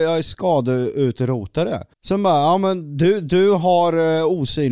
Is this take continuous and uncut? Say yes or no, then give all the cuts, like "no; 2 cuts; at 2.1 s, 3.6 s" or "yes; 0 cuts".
no; 1 cut; at 1.9 s